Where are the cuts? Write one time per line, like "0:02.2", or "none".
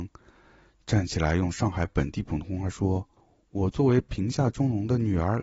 0:03.2